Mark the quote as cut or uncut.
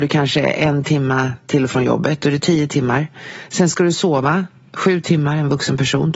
uncut